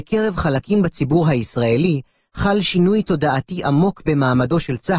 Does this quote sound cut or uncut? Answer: uncut